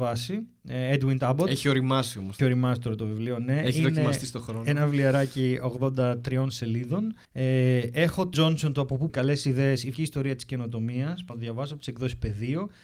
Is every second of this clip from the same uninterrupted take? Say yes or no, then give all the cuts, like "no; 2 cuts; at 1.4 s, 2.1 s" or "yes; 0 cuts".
no; 6 cuts; at 2.4 s, 7.2 s, 8.3 s, 9.1 s, 9.9 s, 11.3 s